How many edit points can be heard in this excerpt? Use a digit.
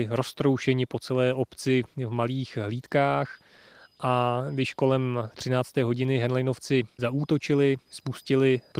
0